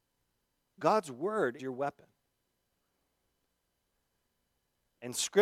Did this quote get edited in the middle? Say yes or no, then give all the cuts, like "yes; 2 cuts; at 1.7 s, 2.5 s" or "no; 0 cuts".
yes; 1 cut; at 1.6 s